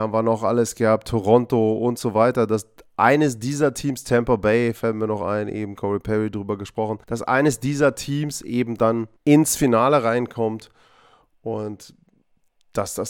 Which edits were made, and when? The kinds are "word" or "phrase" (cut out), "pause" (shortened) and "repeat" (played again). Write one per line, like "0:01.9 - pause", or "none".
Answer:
0:07.0 - pause
0:09.2 - pause